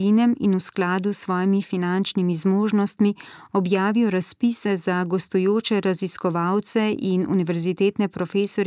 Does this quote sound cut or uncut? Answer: uncut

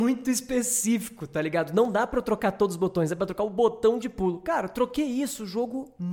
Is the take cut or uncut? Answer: uncut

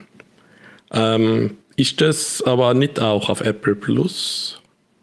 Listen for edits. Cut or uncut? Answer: uncut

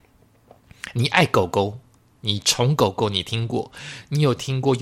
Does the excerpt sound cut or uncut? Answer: uncut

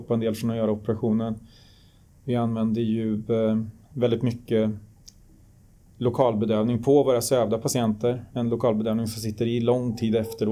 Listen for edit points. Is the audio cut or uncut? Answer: uncut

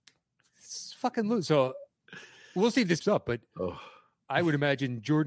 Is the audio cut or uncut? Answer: cut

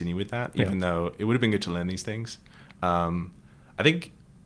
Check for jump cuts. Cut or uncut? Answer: uncut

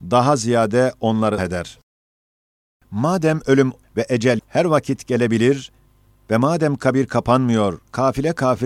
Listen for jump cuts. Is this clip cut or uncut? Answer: cut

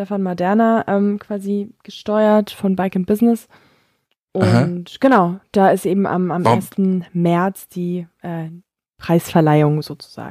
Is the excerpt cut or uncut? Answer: uncut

